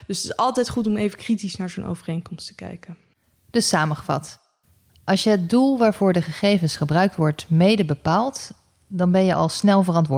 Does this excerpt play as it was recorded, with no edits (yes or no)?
yes